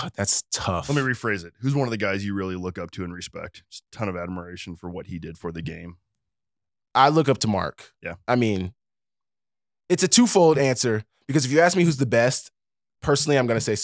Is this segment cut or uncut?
uncut